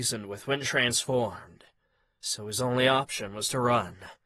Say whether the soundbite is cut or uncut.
uncut